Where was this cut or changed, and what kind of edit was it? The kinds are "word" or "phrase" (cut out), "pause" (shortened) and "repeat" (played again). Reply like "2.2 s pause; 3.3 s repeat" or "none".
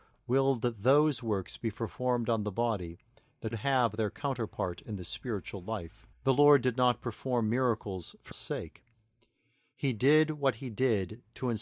3.5 s word; 6.1 s pause; 8.3 s word